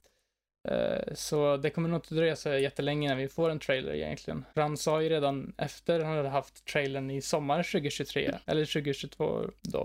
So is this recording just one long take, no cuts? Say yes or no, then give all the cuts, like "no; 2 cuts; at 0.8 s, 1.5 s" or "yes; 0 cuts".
yes; 0 cuts